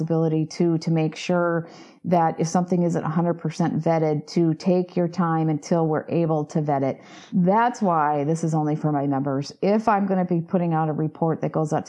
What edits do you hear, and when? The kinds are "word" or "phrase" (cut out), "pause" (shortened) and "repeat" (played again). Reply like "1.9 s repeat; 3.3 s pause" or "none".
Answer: none